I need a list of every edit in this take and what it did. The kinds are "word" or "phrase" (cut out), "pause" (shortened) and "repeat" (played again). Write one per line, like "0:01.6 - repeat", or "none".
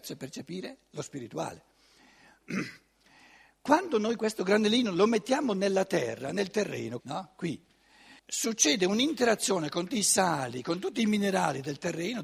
0:07.0 - word
0:08.2 - pause
0:09.9 - word